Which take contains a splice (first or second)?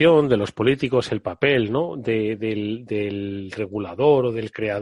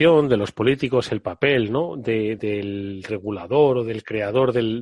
second